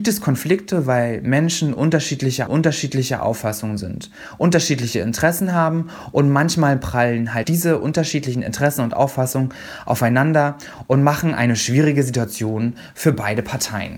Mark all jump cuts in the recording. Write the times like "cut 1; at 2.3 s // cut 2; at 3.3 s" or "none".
cut 1; at 2.5 s // cut 2; at 7.4 s